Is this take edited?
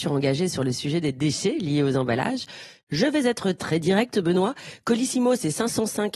no; 0 cuts

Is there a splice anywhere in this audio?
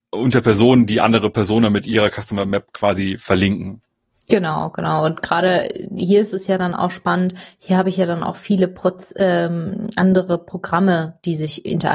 no; 0 cuts

